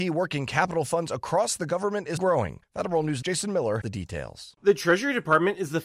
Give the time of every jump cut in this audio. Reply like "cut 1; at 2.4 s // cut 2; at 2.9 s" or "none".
cut 1; at 2.2 s // cut 2; at 2.6 s // cut 3; at 3.2 s // cut 4; at 3.8 s